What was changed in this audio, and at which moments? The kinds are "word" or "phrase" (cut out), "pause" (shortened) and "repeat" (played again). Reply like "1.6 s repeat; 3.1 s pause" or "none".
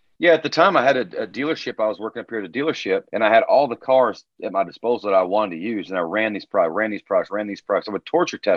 3.1 s pause